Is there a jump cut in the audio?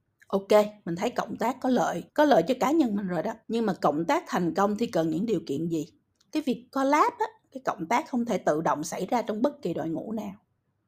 yes; 3 cuts; at 2.1 s, 3.4 s, 6.1 s

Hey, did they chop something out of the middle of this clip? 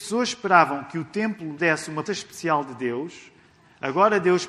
yes; 2 cuts; at 1.6 s, 2.1 s

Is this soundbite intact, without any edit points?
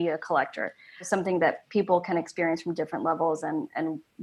yes; 0 cuts

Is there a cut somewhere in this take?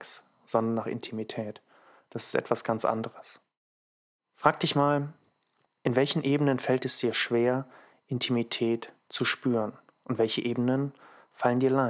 no; 0 cuts

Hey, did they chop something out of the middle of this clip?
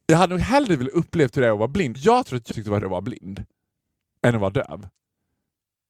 yes; 3 cuts; at 1.9 s, 2.5 s, 2.8 s

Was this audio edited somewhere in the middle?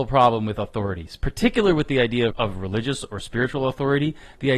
yes; 1 cut; at 2.3 s

